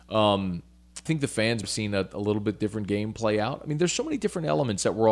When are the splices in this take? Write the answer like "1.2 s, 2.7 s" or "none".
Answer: 1.1 s, 1.6 s